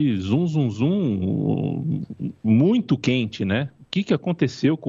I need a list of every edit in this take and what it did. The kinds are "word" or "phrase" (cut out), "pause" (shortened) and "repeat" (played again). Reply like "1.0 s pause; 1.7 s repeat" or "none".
none